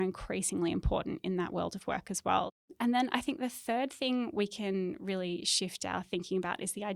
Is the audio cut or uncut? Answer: uncut